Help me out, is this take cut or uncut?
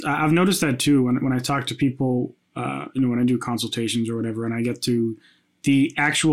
uncut